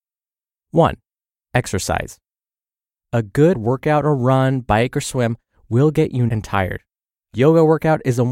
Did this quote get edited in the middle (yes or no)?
yes